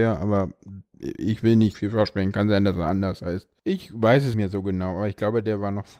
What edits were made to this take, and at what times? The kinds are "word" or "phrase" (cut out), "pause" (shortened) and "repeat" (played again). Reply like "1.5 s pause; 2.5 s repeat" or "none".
1.7 s word; 3.6 s pause; 4.3 s word